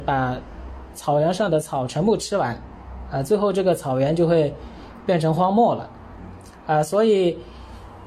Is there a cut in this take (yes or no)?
no